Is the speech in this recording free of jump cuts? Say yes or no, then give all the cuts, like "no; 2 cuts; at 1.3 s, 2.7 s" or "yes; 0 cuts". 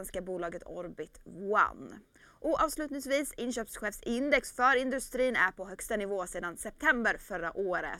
yes; 0 cuts